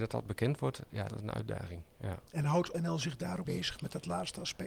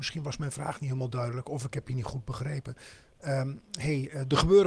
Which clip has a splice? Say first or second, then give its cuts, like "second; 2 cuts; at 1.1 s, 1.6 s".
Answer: first; 4 cuts; at 1.1 s, 2.3 s, 2.7 s, 3.5 s